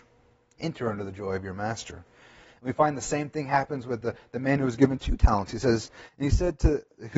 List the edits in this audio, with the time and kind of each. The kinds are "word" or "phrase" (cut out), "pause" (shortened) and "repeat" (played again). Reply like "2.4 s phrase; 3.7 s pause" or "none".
none